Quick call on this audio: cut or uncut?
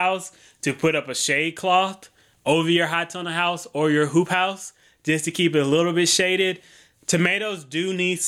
uncut